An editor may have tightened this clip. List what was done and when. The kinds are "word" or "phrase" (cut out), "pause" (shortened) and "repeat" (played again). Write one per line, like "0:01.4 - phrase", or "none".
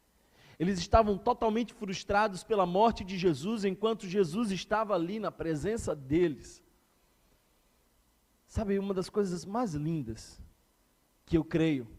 none

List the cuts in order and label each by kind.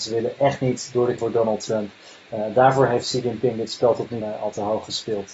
0:01.2 - word
0:04.2 - word

